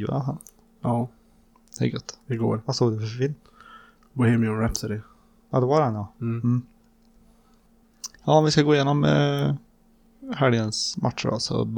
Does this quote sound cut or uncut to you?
cut